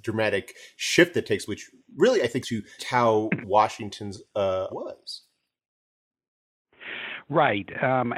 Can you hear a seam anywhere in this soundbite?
yes; 5 cuts; at 1.5 s, 2.4 s, 2.8 s, 3.4 s, 4.7 s

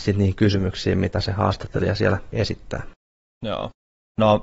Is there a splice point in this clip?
no; 0 cuts

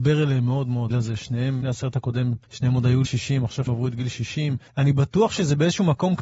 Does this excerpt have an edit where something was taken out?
yes; 6 cuts; at 0.9 s, 1.6 s, 2.4 s, 3.0 s, 3.7 s, 4.7 s

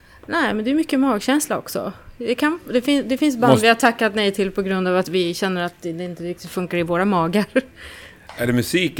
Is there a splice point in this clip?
no; 0 cuts

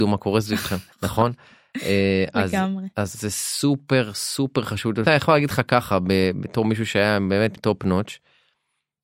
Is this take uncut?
no; 4 cuts; at 0.9 s, 3.1 s, 5.1 s, 7.6 s

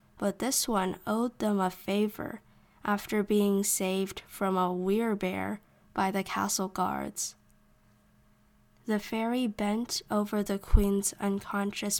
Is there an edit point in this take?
no; 0 cuts

